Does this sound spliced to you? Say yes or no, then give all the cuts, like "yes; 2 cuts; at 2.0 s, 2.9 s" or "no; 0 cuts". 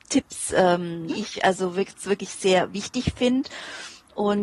yes; 1 cut; at 1.1 s